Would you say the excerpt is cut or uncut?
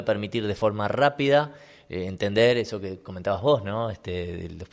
uncut